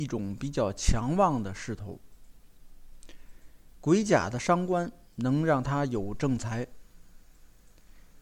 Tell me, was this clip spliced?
no; 0 cuts

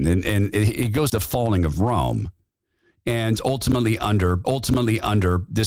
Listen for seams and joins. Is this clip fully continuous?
no; 2 cuts; at 1.1 s, 4.4 s

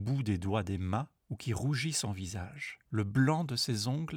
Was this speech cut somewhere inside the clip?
yes; 2 cuts; at 1.2 s, 2.9 s

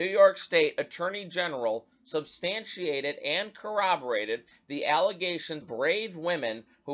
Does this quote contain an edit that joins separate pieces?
yes; 1 cut; at 5.6 s

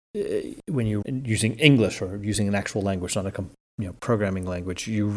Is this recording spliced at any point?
yes; 1 cut; at 1.0 s

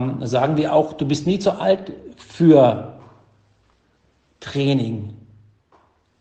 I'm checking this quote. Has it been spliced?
no; 0 cuts

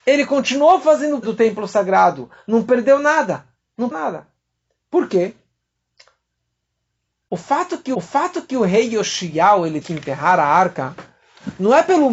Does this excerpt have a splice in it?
yes; 4 cuts; at 1.2 s, 3.9 s, 7.9 s, 9.8 s

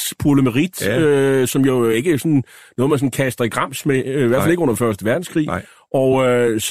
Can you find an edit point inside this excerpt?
no; 0 cuts

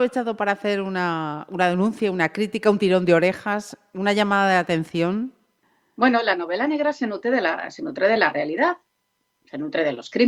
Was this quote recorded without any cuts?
yes; 0 cuts

